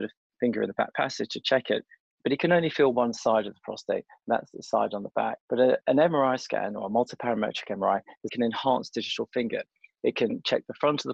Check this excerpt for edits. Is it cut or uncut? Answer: cut